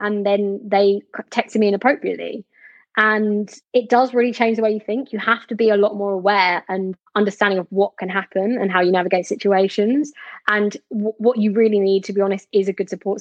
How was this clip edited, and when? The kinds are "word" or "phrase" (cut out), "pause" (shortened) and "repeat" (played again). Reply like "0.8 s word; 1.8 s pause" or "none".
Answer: 3.6 s pause; 7.1 s pause